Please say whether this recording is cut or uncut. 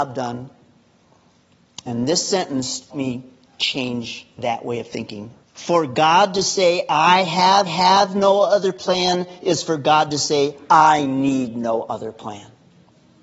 cut